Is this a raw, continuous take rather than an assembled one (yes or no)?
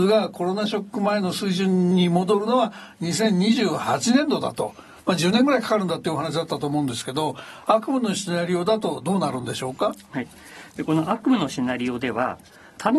yes